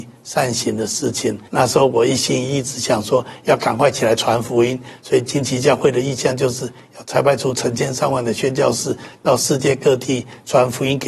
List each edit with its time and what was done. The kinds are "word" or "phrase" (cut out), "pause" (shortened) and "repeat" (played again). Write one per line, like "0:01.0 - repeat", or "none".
0:01.5 - pause